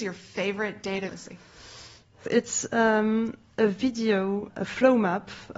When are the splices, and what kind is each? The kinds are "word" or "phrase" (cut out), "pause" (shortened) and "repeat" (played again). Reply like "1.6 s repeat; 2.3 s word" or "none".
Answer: 1.1 s word; 2.3 s word; 4.5 s word